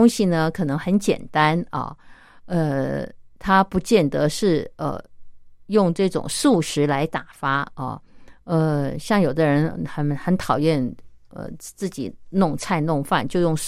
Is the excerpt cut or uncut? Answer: uncut